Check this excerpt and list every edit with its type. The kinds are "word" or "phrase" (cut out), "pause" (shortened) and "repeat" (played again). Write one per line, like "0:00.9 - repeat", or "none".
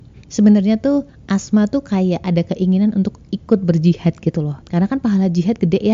0:01.1 - pause
0:04.6 - pause